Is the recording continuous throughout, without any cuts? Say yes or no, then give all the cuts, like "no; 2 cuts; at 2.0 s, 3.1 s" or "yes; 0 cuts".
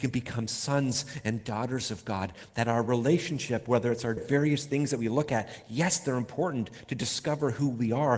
no; 1 cut; at 4.2 s